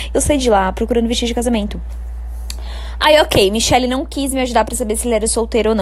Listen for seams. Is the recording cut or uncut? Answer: uncut